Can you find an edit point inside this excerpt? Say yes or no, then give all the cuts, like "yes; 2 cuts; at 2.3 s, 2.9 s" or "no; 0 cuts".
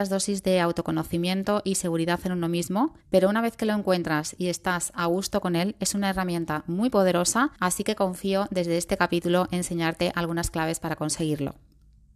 yes; 2 cuts; at 3.0 s, 7.6 s